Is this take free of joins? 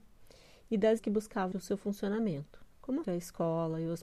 no; 4 cuts; at 1.0 s, 1.5 s, 2.7 s, 3.0 s

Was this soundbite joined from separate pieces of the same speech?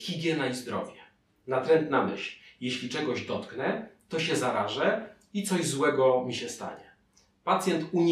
no; 0 cuts

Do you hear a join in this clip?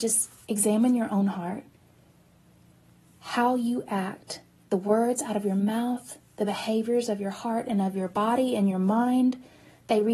no; 0 cuts

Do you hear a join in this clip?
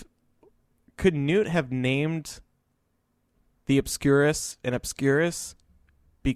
no; 0 cuts

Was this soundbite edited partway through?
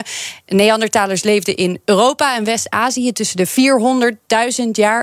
no; 0 cuts

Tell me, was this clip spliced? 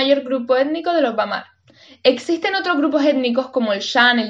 no; 0 cuts

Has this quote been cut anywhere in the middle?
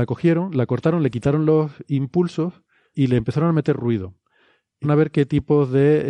yes; 2 cuts; at 2.9 s, 4.8 s

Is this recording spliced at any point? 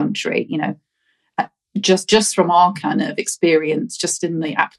no; 0 cuts

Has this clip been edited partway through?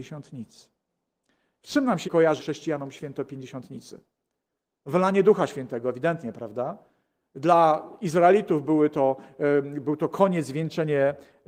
yes; 2 cuts; at 2.0 s, 2.4 s

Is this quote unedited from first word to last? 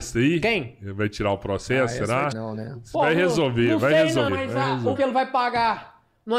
no; 3 cuts; at 2.3 s, 4.3 s, 5.0 s

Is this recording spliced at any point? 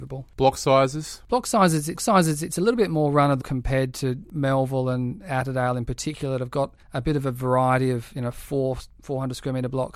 yes; 3 cuts; at 2.0 s, 3.4 s, 6.8 s

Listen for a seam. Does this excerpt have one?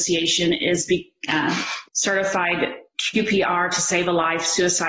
yes; 2 cuts; at 1.3 s, 1.9 s

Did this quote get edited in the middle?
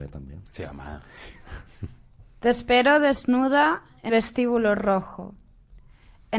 yes; 1 cut; at 4.1 s

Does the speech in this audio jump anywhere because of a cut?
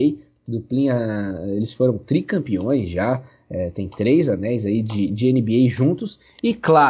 no; 0 cuts

